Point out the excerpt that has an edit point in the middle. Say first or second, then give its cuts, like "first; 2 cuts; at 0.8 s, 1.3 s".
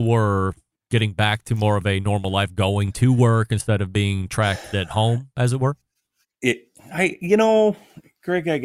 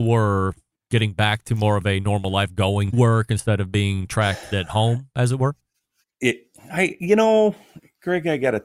second; 1 cut; at 2.9 s